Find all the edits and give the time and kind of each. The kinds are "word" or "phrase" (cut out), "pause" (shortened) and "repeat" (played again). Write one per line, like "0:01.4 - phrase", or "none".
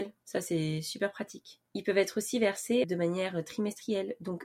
0:01.7 - pause
0:02.8 - word